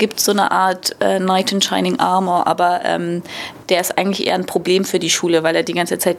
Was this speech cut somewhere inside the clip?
no; 0 cuts

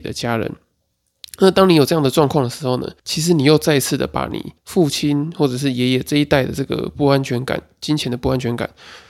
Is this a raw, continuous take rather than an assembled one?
no; 2 cuts; at 3.0 s, 4.6 s

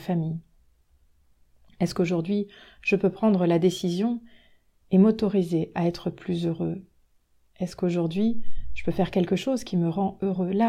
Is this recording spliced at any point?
no; 0 cuts

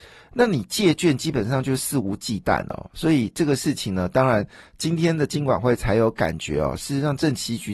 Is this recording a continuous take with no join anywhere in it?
yes; 0 cuts

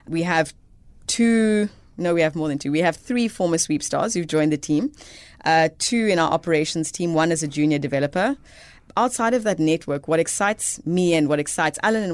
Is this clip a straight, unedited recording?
yes; 0 cuts

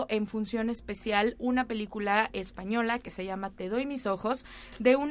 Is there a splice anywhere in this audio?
no; 0 cuts

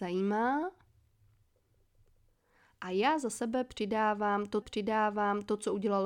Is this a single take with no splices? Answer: no; 1 cut; at 4.6 s

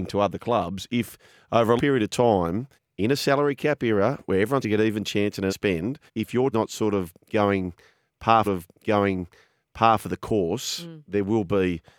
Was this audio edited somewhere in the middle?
yes; 7 cuts; at 1.8 s, 2.7 s, 4.6 s, 5.5 s, 6.1 s, 6.5 s, 8.4 s

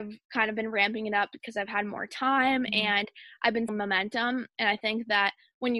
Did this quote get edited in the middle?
yes; 2 cuts; at 1.4 s, 3.7 s

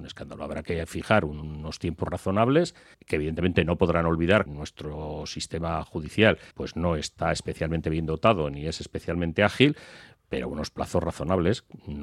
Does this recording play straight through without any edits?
no; 3 cuts; at 2.9 s, 4.5 s, 6.5 s

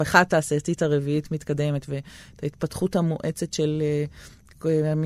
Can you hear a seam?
no; 0 cuts

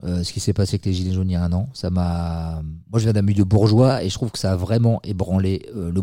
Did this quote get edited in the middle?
yes; 1 cut; at 2.8 s

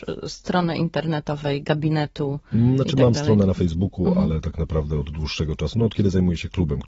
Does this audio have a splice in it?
no; 0 cuts

